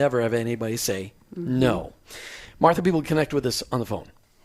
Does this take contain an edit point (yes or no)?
yes